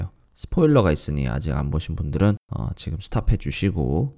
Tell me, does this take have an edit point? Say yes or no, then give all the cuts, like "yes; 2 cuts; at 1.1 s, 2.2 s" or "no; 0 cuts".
yes; 1 cut; at 2.4 s